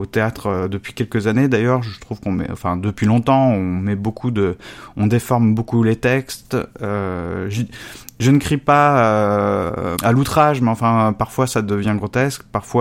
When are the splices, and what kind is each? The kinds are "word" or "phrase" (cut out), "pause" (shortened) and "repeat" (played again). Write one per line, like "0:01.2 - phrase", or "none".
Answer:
0:10.0 - word